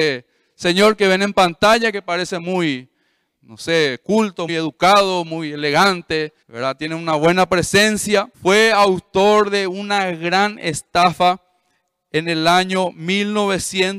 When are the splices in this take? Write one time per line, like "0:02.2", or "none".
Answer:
0:03.3
0:04.5
0:06.4
0:08.3

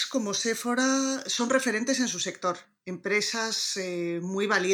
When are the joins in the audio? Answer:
none

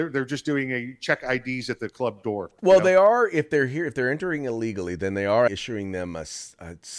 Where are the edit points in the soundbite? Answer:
0:05.5

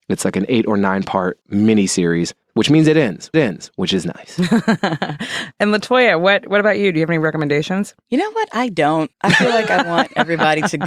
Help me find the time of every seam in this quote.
0:01.4
0:02.4
0:03.3
0:09.1

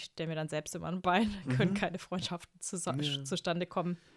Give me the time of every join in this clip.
none

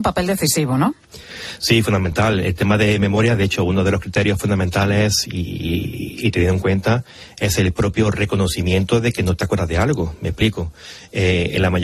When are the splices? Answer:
none

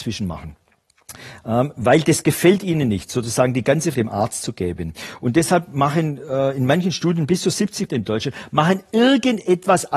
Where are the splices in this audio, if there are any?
0:03.9
0:07.9

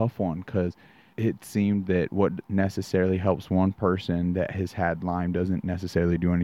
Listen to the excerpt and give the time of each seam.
0:01.1

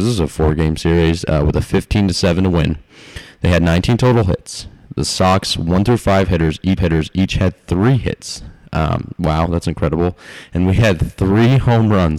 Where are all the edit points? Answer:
0:06.8

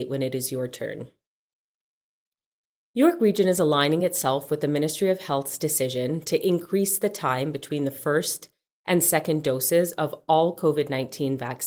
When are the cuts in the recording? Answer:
none

